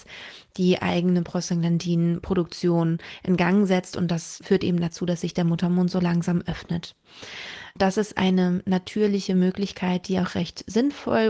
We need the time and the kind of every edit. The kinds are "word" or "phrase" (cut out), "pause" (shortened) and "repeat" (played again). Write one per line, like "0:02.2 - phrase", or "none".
0:04.4 - word